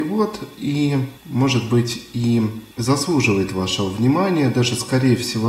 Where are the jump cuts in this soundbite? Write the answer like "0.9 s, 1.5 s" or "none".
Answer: 1.2 s, 2.7 s